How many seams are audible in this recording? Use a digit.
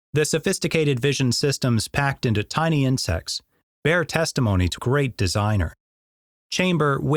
1